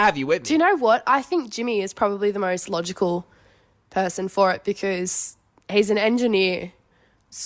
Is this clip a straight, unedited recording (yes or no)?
yes